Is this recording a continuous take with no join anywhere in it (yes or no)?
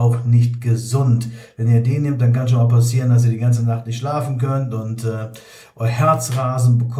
yes